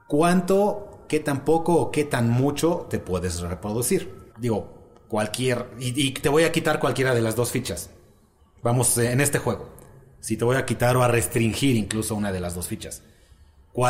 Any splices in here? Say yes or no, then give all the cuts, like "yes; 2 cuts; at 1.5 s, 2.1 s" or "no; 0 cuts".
yes; 1 cut; at 4.3 s